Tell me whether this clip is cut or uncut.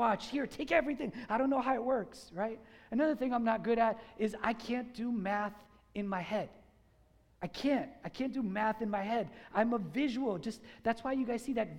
uncut